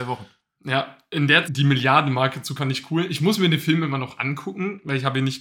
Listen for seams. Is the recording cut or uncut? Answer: cut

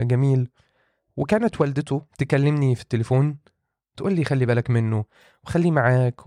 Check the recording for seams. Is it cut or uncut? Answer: cut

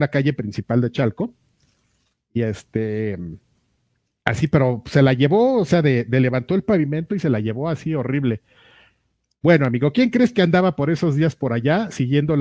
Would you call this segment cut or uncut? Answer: uncut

